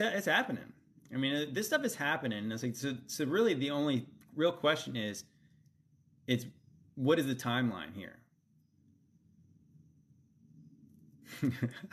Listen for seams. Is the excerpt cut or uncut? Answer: uncut